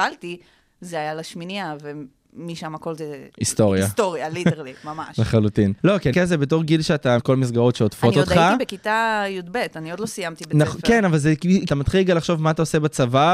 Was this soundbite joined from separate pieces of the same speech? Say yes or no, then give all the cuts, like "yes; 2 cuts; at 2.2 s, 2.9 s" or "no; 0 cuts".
yes; 5 cuts; at 3.3 s, 5.8 s, 6.1 s, 7.2 s, 11.7 s